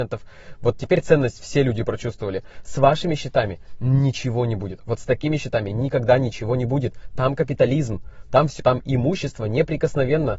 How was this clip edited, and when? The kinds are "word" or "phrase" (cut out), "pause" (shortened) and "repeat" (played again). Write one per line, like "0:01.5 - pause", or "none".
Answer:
0:08.6 - word